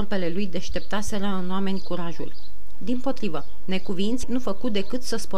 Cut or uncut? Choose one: cut